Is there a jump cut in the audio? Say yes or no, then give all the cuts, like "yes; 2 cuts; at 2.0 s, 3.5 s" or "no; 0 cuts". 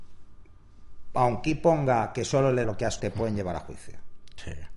yes; 3 cuts; at 1.5 s, 2.6 s, 3.0 s